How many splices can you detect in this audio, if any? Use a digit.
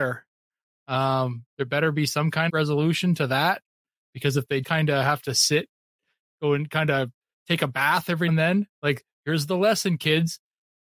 5